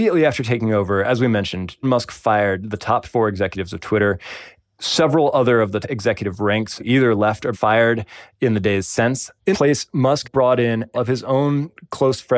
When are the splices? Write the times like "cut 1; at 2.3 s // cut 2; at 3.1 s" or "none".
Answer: cut 1; at 1.8 s // cut 2; at 5.8 s // cut 3; at 6.8 s // cut 4; at 7.5 s // cut 5; at 9.5 s // cut 6; at 10.2 s // cut 7; at 10.9 s